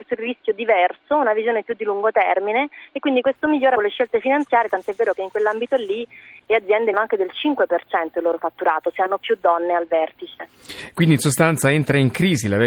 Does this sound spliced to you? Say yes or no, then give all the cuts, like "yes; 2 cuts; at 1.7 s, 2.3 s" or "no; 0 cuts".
yes; 2 cuts; at 3.8 s, 6.9 s